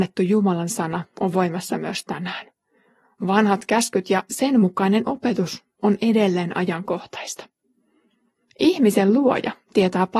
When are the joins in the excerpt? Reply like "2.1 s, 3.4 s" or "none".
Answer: none